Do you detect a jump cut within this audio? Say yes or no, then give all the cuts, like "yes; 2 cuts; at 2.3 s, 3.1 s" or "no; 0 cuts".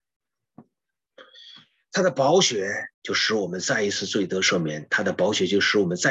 yes; 1 cut; at 2.9 s